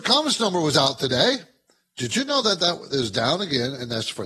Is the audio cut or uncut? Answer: uncut